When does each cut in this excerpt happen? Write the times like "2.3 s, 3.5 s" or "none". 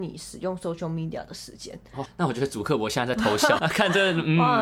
2.1 s, 3.6 s

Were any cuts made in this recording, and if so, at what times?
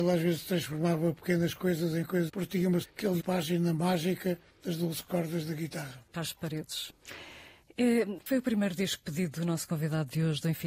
2.3 s, 2.8 s, 3.2 s

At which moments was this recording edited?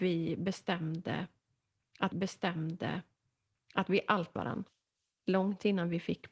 2.1 s, 4.4 s

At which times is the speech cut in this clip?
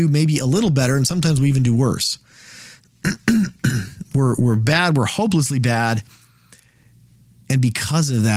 none

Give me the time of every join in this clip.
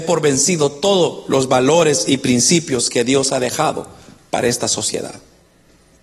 none

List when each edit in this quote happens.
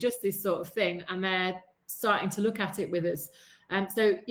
none

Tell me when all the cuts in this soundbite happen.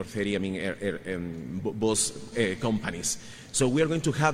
2.3 s

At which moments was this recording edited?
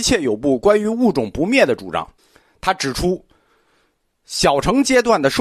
2.2 s

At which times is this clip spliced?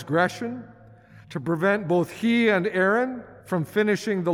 1.2 s, 3.4 s

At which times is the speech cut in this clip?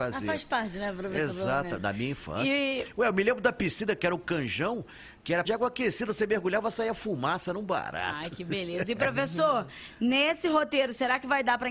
5.5 s

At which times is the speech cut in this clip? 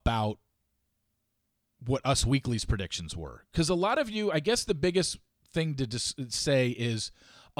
none

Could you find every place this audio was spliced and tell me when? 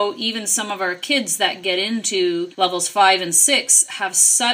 2.5 s

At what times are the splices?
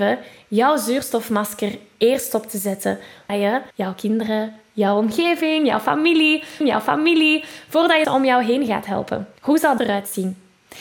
3.3 s, 3.7 s, 6.6 s, 8.0 s, 9.4 s, 9.8 s

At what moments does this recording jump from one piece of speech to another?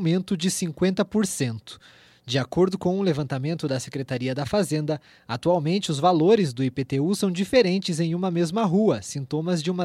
none

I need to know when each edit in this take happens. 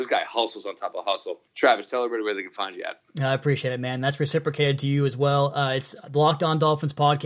1.5 s

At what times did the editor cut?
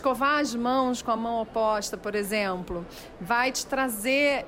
none

